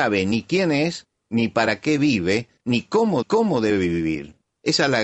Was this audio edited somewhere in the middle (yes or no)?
yes